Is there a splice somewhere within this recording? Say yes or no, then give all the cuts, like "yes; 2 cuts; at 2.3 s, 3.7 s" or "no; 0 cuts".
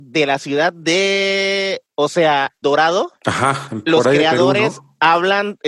yes; 3 cuts; at 1.9 s, 2.6 s, 3.2 s